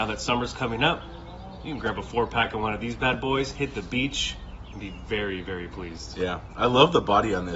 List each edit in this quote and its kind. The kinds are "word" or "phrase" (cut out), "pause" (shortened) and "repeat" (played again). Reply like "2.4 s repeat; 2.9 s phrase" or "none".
none